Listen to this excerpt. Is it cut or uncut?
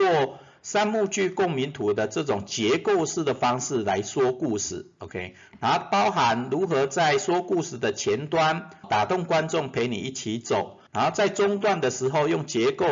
cut